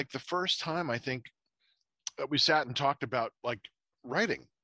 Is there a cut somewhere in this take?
yes; 1 cut; at 3.4 s

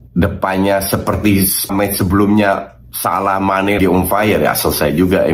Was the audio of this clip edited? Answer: yes; 2 cuts; at 1.7 s, 3.8 s

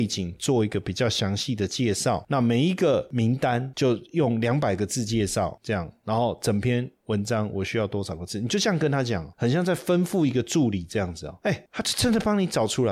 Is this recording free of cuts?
yes; 0 cuts

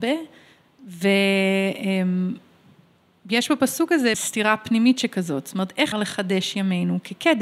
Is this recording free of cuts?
no; 2 cuts; at 4.1 s, 5.9 s

